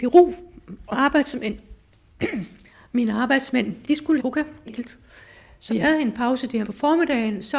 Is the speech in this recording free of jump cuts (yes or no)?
no